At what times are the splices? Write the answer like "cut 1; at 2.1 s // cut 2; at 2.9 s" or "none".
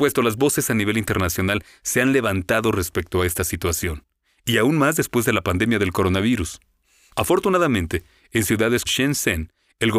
cut 1; at 8.9 s